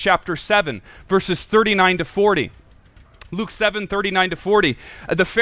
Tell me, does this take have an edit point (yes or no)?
no